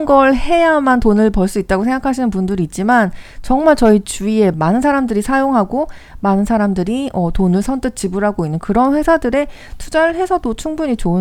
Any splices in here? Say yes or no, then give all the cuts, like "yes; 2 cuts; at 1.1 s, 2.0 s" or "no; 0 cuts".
yes; 1 cut; at 4.5 s